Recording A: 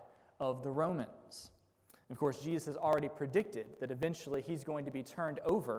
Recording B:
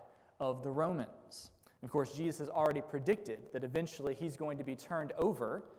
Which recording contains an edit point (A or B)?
B